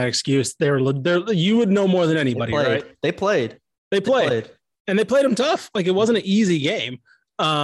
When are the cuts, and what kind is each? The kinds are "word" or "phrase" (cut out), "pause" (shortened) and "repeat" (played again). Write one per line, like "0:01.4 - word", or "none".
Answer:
none